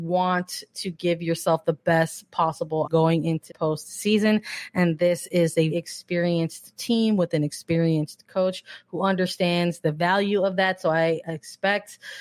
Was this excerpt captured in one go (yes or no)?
no